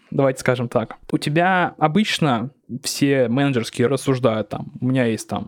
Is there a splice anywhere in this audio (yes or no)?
yes